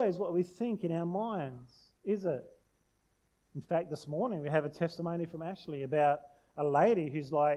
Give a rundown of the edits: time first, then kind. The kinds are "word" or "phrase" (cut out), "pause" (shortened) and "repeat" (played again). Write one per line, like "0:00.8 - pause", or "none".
0:02.0 - pause